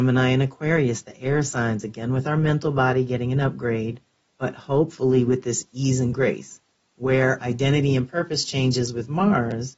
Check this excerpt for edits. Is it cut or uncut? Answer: cut